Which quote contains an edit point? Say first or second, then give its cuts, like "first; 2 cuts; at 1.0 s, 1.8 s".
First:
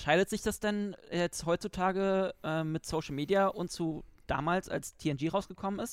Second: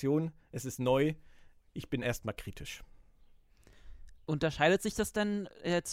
first; 1 cut; at 3.7 s